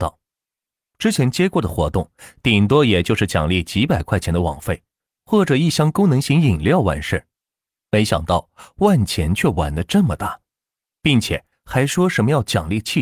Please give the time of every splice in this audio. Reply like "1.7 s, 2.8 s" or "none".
none